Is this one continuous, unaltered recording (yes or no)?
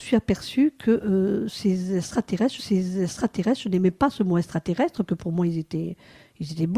no